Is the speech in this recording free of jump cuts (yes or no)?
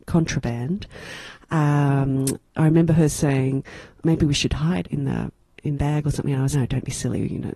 no